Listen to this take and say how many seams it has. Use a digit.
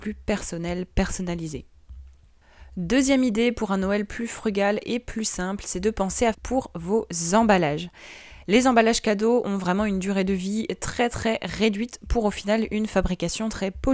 1